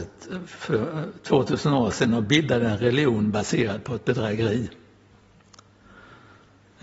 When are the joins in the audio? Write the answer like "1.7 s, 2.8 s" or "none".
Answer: none

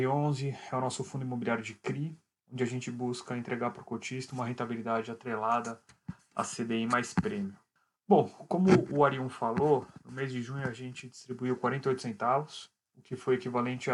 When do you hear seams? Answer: none

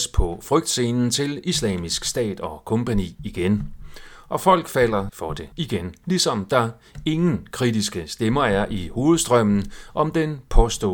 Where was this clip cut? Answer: 5.1 s, 5.5 s

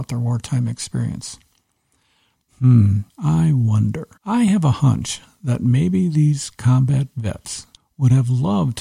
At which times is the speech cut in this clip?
3.1 s, 4.2 s, 7.8 s

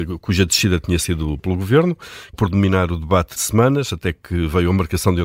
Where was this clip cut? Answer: 1.4 s, 2.3 s, 3.4 s

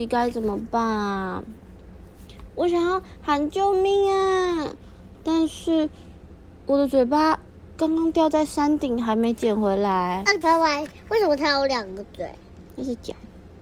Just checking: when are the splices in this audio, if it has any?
10.4 s

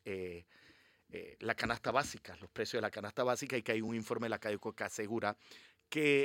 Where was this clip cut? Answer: none

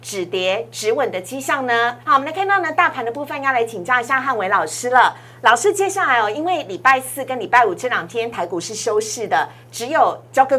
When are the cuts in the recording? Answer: 2.0 s

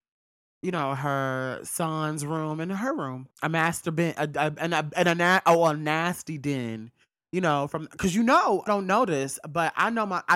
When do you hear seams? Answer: 3.3 s, 8.7 s

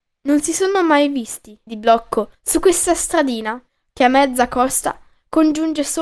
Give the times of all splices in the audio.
1.7 s, 2.3 s, 3.7 s

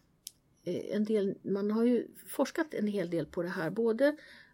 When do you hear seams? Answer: none

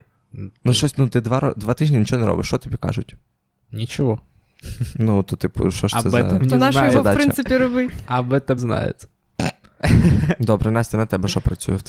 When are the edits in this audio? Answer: 0.9 s, 8.6 s

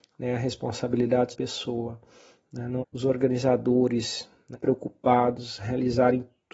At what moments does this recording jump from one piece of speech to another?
1.3 s, 2.8 s, 4.5 s

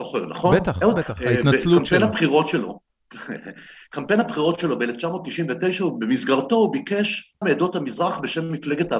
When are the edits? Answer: 1.0 s, 7.4 s

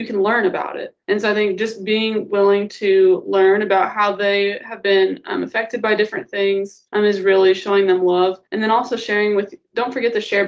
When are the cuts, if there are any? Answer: 1.0 s, 6.9 s, 8.5 s

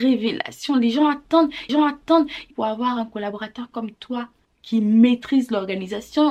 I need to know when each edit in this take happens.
1.7 s, 2.5 s, 4.4 s

